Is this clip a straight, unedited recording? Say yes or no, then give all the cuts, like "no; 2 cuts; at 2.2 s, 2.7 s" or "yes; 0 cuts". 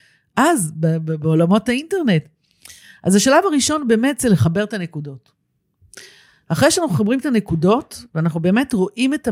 yes; 0 cuts